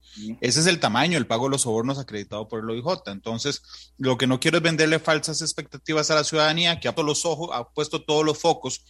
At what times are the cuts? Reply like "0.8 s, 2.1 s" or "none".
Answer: 7.0 s